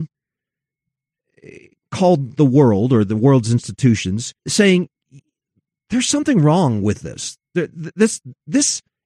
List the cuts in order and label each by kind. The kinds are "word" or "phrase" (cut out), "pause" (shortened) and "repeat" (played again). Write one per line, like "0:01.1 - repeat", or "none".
0:04.4 - pause